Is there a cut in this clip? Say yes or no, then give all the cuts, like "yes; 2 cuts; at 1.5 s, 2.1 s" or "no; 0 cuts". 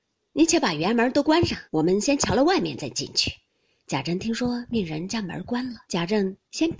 yes; 3 cuts; at 1.7 s, 3.5 s, 5.8 s